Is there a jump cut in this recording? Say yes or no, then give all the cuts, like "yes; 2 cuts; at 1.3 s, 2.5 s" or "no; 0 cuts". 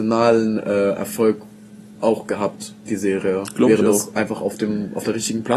no; 0 cuts